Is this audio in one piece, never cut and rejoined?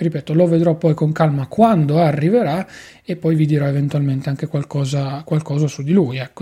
yes; 0 cuts

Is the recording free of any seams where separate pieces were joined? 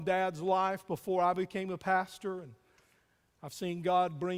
yes; 0 cuts

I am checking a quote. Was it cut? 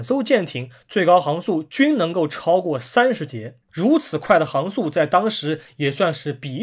yes; 1 cut; at 3.6 s

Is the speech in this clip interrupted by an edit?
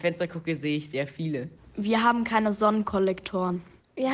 no; 0 cuts

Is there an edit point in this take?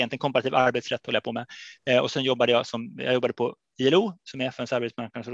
no; 0 cuts

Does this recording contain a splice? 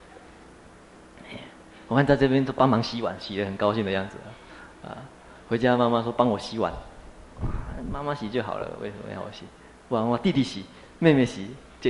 no; 0 cuts

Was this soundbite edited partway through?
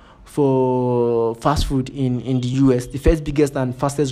no; 0 cuts

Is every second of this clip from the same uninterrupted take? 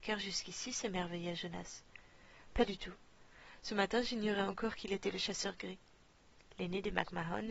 yes; 0 cuts

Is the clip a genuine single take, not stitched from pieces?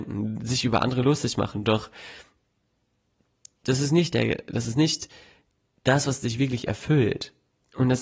yes; 0 cuts

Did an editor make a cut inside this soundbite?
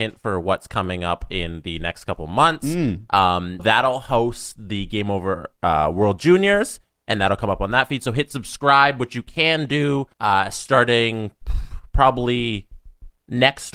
yes; 2 cuts; at 3.6 s, 10.1 s

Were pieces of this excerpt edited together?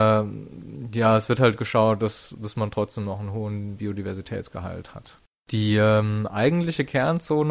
no; 0 cuts

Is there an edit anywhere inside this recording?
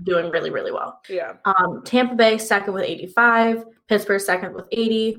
yes; 1 cut; at 1.0 s

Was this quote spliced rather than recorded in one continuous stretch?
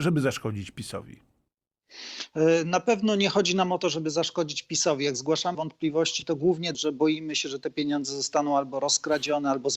yes; 2 cuts; at 5.5 s, 6.7 s

